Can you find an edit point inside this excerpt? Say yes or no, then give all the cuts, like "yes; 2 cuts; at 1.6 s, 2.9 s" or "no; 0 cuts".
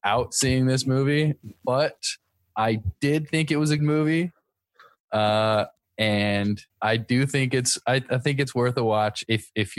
yes; 2 cuts; at 3.8 s, 6.7 s